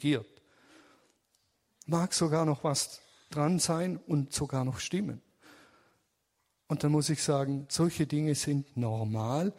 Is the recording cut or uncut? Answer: uncut